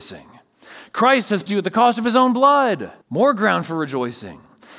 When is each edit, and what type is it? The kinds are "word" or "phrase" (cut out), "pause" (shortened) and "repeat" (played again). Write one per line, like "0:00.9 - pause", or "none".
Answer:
0:01.5 - word
0:03.0 - pause